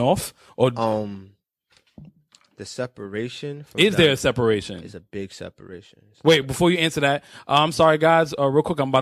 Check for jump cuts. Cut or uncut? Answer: uncut